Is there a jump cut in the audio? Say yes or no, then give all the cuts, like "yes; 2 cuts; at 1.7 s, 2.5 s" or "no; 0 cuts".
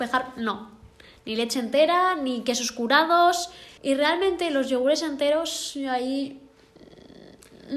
yes; 1 cut; at 3.8 s